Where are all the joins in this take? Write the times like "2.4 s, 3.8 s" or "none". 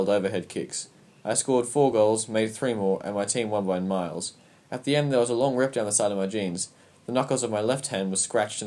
none